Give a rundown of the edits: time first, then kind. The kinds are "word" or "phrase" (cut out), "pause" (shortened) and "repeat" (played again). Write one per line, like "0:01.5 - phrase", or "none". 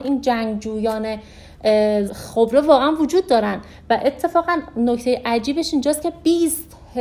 0:02.1 - phrase

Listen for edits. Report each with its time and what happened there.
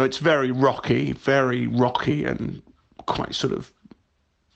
none

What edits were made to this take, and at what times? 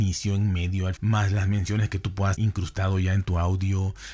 0:01.0 - word
0:02.3 - word

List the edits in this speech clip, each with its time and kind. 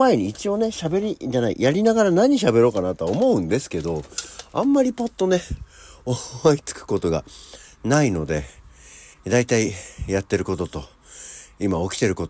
0:09.1 - pause

